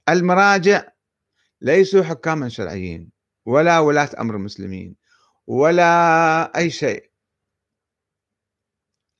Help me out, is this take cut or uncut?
uncut